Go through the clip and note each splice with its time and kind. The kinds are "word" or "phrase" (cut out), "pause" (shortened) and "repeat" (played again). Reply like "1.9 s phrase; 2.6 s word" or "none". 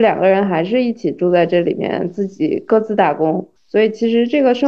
3.6 s pause